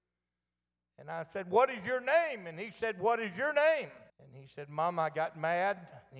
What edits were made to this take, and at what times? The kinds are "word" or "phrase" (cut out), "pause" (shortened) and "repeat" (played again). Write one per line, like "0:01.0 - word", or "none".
0:04.1 - pause